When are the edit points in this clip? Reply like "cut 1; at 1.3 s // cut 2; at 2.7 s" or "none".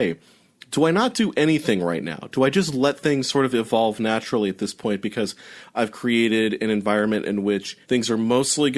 cut 1; at 7.8 s